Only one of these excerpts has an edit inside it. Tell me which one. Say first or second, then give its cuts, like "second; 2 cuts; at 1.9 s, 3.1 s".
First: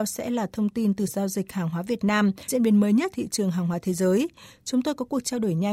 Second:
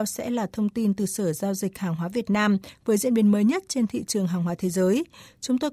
first; 3 cuts; at 1.1 s, 2.5 s, 3.1 s